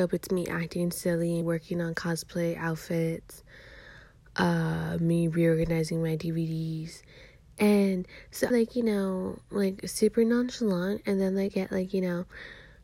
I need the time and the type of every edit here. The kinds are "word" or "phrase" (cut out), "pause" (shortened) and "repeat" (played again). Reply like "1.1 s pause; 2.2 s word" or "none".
1.4 s phrase; 8.5 s phrase; 11.5 s word